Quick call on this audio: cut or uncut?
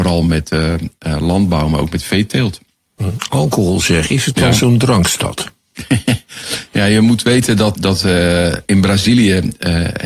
cut